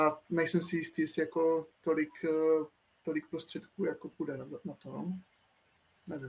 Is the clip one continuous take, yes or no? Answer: yes